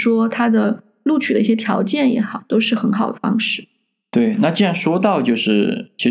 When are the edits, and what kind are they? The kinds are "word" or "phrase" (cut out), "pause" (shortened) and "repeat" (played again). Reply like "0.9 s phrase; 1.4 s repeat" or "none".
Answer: none